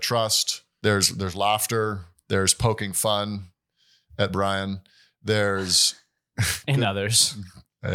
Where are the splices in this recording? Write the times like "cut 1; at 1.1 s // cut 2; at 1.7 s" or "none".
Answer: none